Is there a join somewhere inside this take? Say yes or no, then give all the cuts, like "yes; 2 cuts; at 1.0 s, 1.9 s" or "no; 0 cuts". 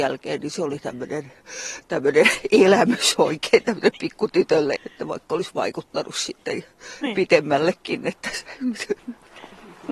yes; 1 cut; at 4.8 s